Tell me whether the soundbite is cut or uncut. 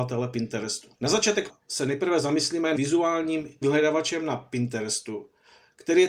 cut